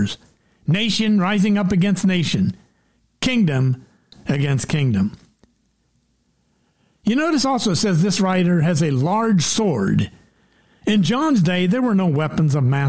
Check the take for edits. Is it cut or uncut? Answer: uncut